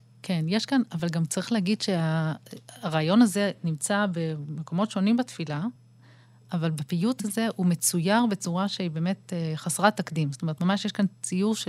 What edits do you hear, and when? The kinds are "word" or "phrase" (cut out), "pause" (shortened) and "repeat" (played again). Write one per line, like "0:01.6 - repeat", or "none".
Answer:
none

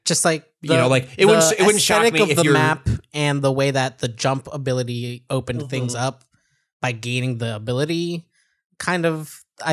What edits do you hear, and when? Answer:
none

